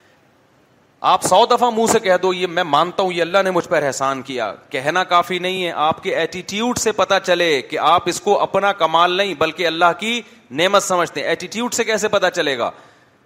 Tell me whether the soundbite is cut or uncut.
uncut